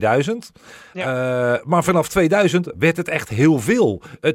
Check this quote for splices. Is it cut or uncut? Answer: uncut